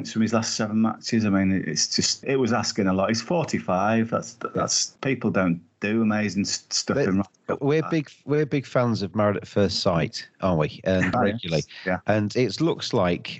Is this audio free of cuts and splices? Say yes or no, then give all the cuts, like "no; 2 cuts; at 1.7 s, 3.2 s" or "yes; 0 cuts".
no; 2 cuts; at 7.6 s, 11.1 s